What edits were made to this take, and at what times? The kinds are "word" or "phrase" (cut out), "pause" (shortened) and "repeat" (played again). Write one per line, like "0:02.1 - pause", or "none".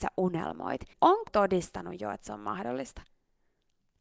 0:00.9 - word
0:01.3 - word